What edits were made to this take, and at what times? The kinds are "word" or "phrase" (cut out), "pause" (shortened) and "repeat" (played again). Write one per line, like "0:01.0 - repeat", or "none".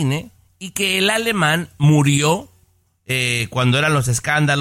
none

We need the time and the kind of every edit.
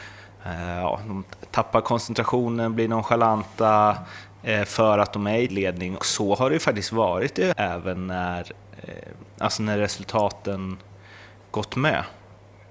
0:05.5 - word
0:06.0 - word
0:07.5 - word

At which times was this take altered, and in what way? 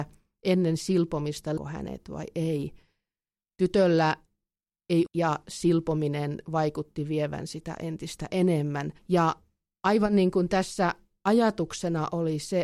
0:01.6 - word
0:05.1 - phrase
0:07.8 - word
0:09.0 - pause

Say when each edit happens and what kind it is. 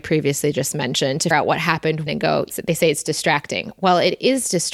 0:01.3 - word
0:02.1 - word
0:02.5 - word

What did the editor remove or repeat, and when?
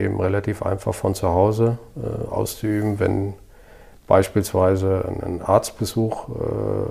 none

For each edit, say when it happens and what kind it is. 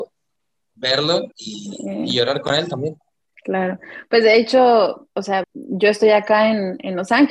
0:01.3 - pause
0:03.2 - pause
0:05.4 - word

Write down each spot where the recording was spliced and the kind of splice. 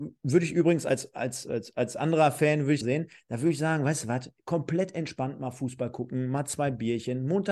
0:02.8 - phrase

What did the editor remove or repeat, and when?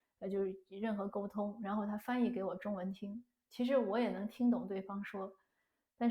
none

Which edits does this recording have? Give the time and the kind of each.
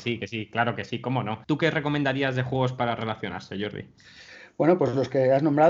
0:01.4 - pause

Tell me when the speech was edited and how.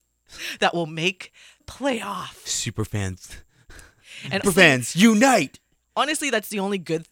0:01.6 - word
0:04.4 - word

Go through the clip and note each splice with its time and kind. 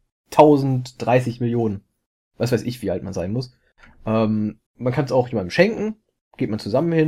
0:04.7 - pause

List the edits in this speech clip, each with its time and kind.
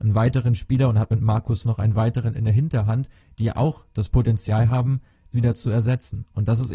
0:01.6 - word
0:03.5 - word
0:05.3 - word

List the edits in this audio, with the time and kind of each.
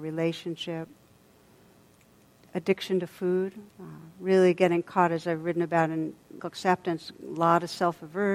0:03.7 - pause
0:06.4 - word

